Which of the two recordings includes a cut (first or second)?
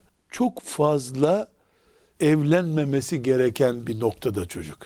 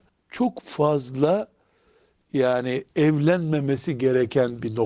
first